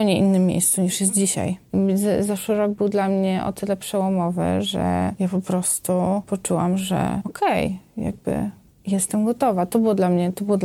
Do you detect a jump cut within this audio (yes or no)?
yes